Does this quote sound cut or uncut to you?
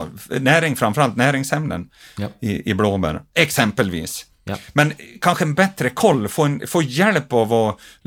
uncut